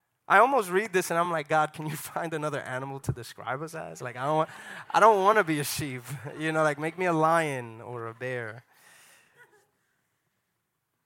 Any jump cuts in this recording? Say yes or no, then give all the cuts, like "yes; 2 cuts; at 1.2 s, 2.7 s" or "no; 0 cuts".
no; 0 cuts